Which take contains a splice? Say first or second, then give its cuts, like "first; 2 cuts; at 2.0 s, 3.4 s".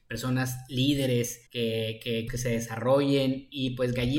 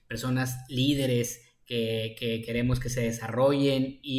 first; 2 cuts; at 1.5 s, 2.3 s